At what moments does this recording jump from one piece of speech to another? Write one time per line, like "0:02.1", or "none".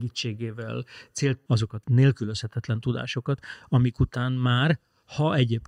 0:01.5
0:01.8